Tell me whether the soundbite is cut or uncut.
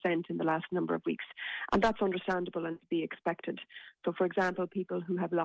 uncut